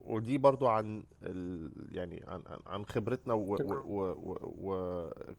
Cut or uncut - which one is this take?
uncut